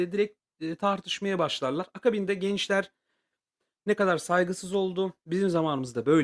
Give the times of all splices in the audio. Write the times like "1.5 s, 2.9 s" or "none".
none